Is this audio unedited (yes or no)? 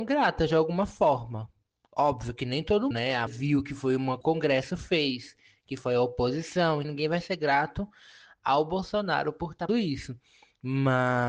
no